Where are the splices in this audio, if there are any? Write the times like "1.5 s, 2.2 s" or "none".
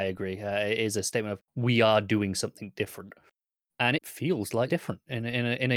1.4 s, 4.0 s, 4.7 s